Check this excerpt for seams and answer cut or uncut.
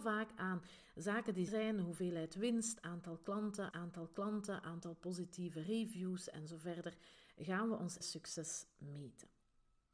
cut